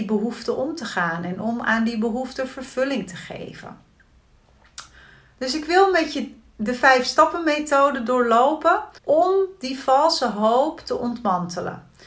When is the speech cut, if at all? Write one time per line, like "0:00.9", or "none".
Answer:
0:09.0